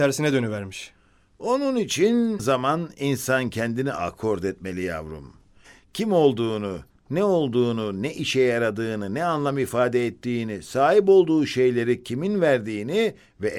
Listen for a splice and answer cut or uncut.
cut